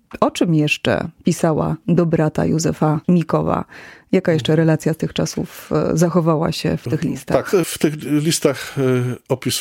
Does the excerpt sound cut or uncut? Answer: cut